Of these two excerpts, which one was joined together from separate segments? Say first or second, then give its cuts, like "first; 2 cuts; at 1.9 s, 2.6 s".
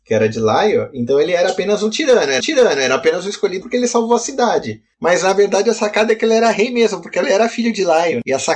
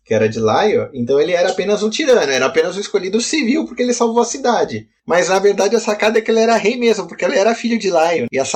first; 2 cuts; at 2.4 s, 3.6 s